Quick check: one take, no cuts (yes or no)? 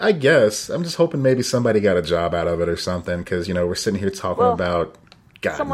yes